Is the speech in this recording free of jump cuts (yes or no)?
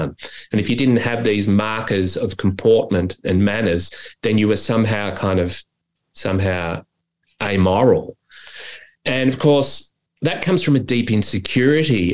no